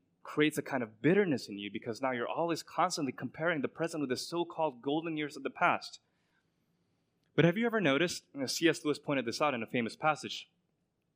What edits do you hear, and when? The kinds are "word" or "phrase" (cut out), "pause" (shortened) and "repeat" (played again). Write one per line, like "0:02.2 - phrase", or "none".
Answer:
none